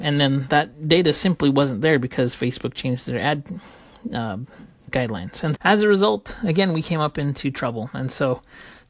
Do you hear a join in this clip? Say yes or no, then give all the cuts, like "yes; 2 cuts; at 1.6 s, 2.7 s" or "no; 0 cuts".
yes; 2 cuts; at 4.9 s, 5.6 s